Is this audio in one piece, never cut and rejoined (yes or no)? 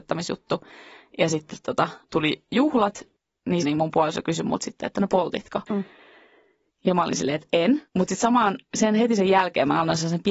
no